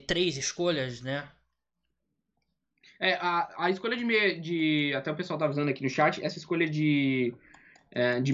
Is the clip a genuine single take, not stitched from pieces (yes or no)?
yes